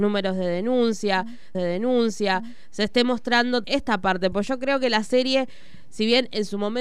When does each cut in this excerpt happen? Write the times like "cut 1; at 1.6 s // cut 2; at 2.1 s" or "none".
cut 1; at 1.5 s // cut 2; at 3.6 s